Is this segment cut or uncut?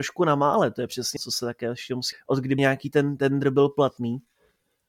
cut